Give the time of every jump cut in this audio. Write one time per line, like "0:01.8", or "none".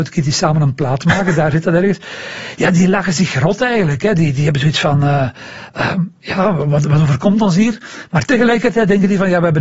none